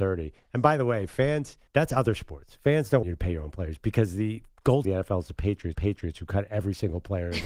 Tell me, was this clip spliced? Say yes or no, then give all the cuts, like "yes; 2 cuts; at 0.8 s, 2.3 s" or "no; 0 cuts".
yes; 4 cuts; at 1.7 s, 3.0 s, 4.8 s, 5.7 s